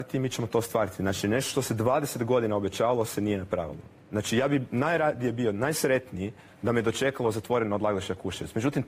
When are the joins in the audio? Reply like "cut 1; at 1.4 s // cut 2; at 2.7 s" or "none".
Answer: none